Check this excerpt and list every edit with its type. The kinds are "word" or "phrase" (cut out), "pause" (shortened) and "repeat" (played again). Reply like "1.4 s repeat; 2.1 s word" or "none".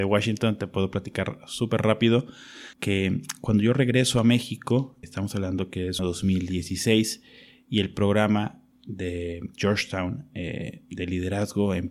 2.7 s pause; 5.0 s word; 6.0 s phrase